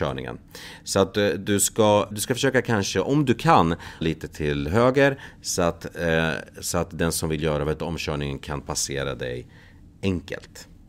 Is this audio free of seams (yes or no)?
no